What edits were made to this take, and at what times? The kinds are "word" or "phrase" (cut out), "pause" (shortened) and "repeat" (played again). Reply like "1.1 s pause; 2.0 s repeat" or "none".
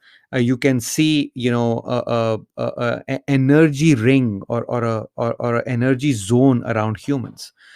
none